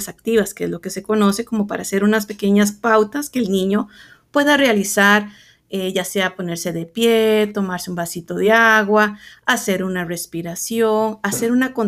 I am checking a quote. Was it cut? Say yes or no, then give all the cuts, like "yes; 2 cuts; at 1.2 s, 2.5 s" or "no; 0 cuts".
no; 0 cuts